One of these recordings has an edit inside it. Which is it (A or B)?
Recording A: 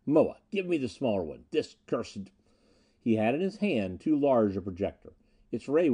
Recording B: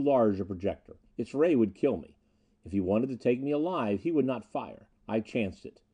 B